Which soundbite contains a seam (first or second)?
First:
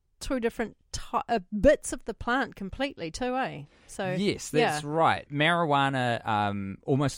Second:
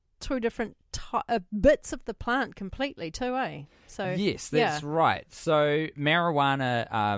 first